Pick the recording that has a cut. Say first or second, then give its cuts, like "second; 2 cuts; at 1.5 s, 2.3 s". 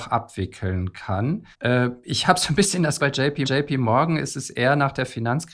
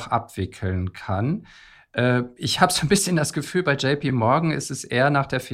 first; 3 cuts; at 1.5 s, 3.0 s, 3.4 s